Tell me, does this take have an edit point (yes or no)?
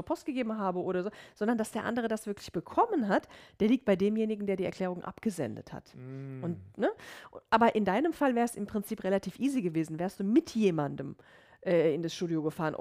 no